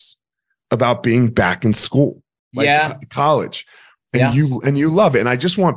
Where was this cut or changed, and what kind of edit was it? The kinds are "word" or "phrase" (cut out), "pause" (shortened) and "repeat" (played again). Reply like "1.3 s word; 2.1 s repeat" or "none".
none